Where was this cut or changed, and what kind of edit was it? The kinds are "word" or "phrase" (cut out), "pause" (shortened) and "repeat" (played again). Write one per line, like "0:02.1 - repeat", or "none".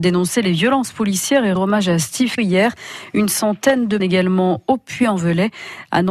0:01.5 - word
0:02.4 - word
0:04.0 - word